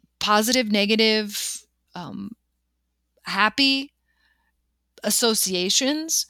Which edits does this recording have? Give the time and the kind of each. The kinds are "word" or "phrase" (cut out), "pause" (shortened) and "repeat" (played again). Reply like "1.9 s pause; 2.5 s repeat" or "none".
1.9 s word